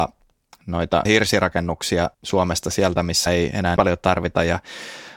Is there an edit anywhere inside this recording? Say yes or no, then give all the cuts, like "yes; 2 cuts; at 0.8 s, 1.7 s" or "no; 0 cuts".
yes; 4 cuts; at 1.1 s, 2.1 s, 3.3 s, 3.8 s